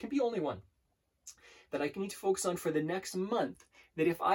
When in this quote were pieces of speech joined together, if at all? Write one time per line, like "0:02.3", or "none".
none